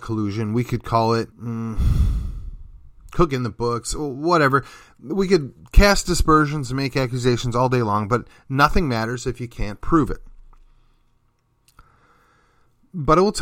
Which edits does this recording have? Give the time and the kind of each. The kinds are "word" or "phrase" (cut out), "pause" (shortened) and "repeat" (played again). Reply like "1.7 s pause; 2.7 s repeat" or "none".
1.3 s pause